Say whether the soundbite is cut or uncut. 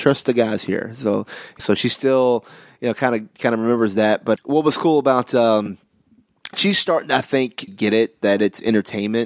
cut